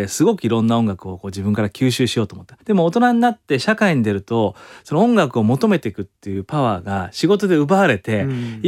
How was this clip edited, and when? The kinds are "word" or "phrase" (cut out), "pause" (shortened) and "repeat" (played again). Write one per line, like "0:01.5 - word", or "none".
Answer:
0:02.6 - pause